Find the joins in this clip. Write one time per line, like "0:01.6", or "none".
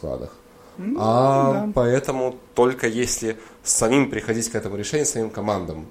0:02.5

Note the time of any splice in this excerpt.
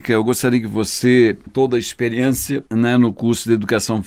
0:01.5
0:02.7

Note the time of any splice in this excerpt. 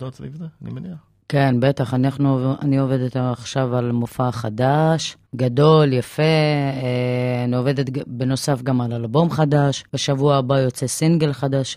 0:01.2
0:05.3
0:09.9

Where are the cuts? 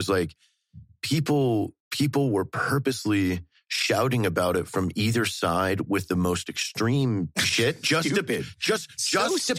0:01.8
0:03.6
0:07.8

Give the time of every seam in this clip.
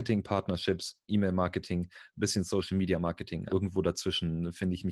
0:01.1
0:03.5

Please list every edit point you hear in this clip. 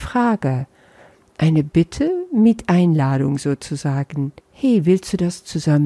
0:04.4

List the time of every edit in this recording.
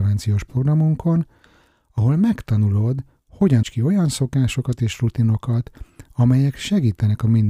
0:03.6

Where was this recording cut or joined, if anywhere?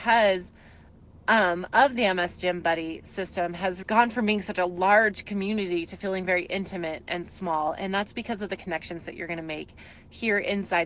0:03.8

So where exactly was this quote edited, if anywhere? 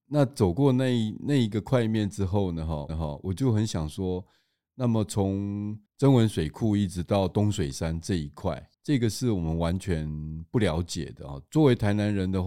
0:02.9
0:05.9
0:08.7

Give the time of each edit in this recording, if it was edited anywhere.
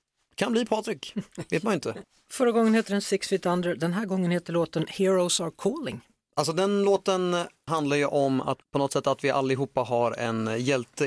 none

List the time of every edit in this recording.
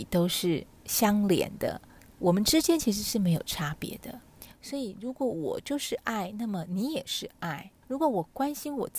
0:07.8

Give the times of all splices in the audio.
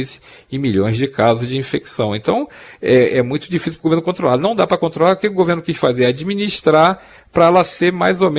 none

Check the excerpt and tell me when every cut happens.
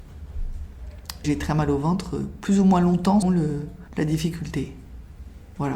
0:01.2
0:03.2
0:03.9

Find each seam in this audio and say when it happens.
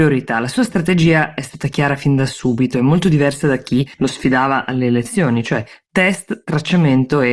0:03.9

